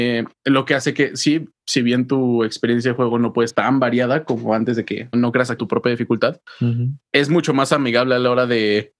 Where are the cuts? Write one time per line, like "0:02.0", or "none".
0:03.5
0:05.1
0:05.6